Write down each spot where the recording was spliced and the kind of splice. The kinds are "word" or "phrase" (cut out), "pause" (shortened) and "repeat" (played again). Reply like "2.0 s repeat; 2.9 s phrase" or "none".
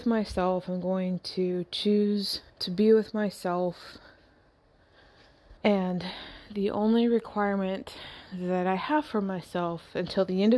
2.5 s pause; 5.6 s pause